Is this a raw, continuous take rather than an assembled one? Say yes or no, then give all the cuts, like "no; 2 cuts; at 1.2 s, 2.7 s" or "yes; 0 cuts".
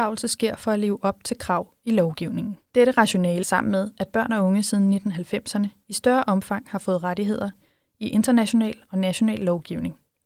no; 2 cuts; at 2.6 s, 3.4 s